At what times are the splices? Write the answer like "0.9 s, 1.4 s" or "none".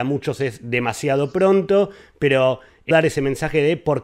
2.9 s